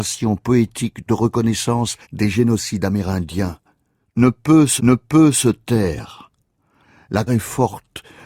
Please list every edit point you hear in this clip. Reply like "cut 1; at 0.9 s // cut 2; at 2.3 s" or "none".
cut 1; at 2.0 s // cut 2; at 4.8 s // cut 3; at 7.3 s